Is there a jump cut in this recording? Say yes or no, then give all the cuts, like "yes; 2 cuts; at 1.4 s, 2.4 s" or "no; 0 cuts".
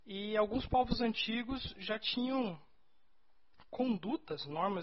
no; 0 cuts